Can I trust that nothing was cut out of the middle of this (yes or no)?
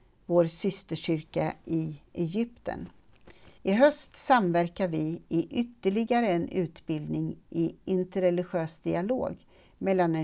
no